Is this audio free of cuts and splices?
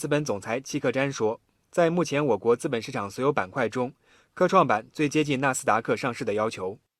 yes; 0 cuts

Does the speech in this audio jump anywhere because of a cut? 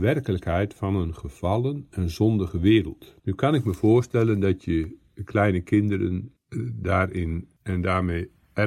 yes; 1 cut; at 3.2 s

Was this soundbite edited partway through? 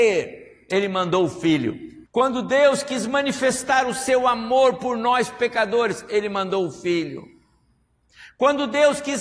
yes; 1 cut; at 2.1 s

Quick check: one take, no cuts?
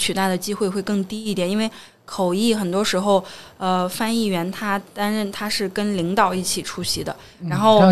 yes; 0 cuts

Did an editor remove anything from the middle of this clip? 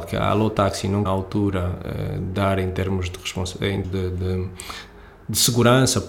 yes; 2 cuts; at 1.1 s, 3.8 s

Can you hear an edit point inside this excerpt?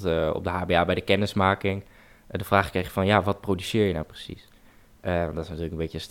no; 0 cuts

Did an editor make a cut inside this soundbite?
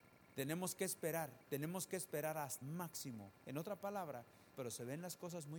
yes; 2 cuts; at 2.6 s, 4.6 s

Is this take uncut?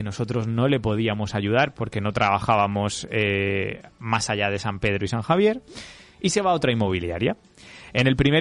yes; 0 cuts

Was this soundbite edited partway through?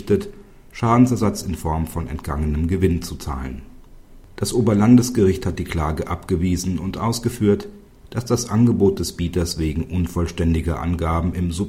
yes; 1 cut; at 4.3 s

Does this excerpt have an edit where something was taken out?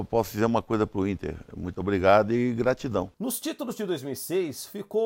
yes; 1 cut; at 3.1 s

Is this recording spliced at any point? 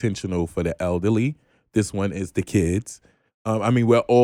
no; 0 cuts

